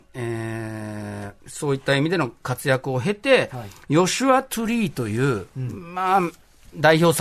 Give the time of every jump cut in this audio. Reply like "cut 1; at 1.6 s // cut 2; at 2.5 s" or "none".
cut 1; at 1.4 s

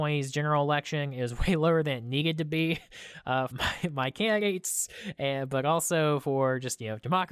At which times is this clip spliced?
cut 1; at 3.5 s

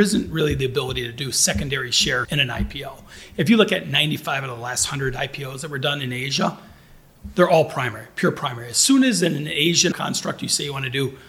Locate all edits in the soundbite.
cut 1; at 2.2 s // cut 2; at 9.9 s

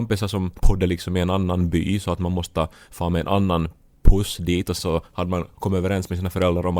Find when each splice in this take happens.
cut 1; at 4.8 s

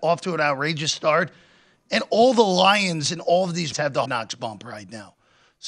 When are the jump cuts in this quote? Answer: cut 1; at 3.7 s // cut 2; at 4.1 s

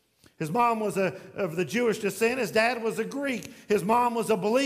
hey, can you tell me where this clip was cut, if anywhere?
none

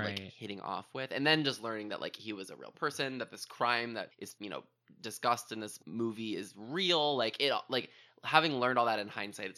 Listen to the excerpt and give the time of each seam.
none

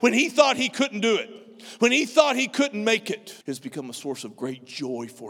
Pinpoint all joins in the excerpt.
cut 1; at 3.4 s

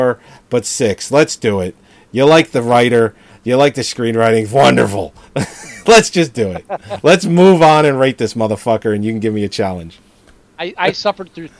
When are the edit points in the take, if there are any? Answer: none

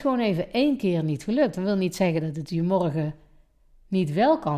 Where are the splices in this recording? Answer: none

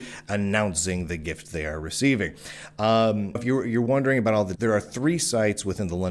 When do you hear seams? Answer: cut 1; at 3.4 s // cut 2; at 4.6 s

